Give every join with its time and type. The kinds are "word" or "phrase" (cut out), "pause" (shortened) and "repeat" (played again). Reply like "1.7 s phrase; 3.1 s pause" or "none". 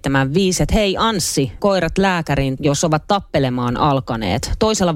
1.6 s word; 2.6 s word